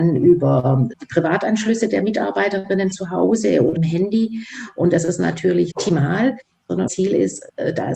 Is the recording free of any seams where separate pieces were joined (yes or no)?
no